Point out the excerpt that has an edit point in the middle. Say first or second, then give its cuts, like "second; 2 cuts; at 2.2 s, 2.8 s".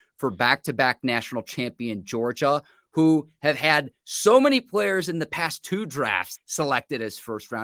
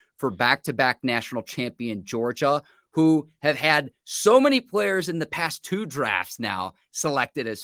first; 1 cut; at 6.4 s